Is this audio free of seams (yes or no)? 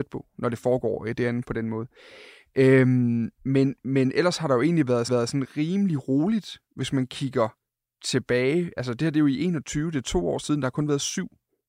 no